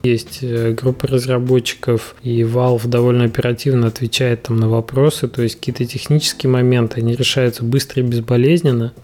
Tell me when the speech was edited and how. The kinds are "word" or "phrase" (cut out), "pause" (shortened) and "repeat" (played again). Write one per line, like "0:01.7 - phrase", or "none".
none